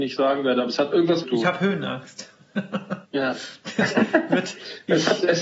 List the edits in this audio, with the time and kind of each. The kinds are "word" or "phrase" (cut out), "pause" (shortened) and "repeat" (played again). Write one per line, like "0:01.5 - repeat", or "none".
0:01.2 - phrase
0:03.0 - pause